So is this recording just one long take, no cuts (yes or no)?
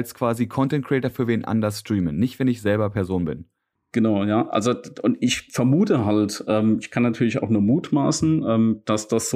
yes